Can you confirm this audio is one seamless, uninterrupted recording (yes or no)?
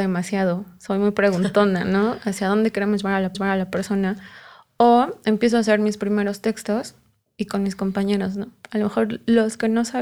no